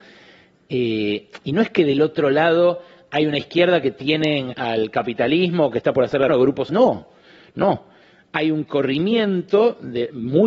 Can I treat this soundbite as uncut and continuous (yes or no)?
no